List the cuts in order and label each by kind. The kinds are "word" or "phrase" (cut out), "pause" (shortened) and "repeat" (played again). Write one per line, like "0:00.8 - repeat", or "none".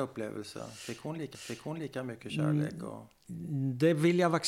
0:01.3 - repeat